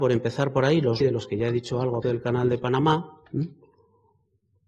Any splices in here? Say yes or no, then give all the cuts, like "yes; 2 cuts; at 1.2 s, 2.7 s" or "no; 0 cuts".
yes; 3 cuts; at 1.0 s, 2.0 s, 3.3 s